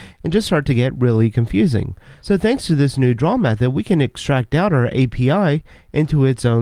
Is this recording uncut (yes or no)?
yes